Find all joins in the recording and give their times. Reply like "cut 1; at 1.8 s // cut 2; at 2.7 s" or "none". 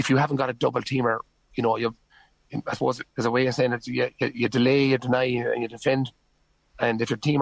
none